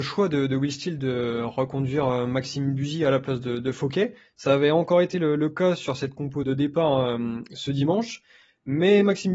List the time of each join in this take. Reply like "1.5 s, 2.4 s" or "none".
6.4 s